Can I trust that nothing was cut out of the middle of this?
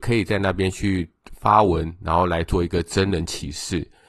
yes; 0 cuts

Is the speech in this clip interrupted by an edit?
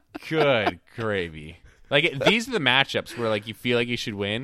no; 0 cuts

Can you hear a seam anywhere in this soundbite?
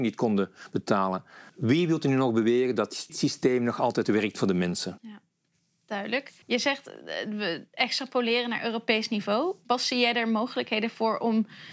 yes; 3 cuts; at 1.5 s, 3.1 s, 6.4 s

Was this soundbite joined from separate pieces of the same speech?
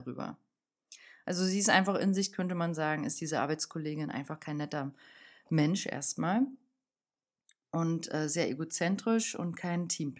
no; 0 cuts

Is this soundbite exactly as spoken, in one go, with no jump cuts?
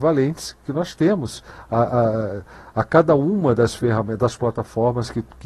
yes; 0 cuts

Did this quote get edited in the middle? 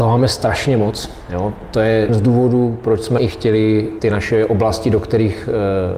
yes; 3 cuts; at 2.1 s, 3.2 s, 4.0 s

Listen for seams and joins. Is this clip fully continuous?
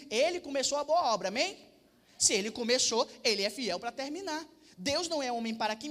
yes; 0 cuts

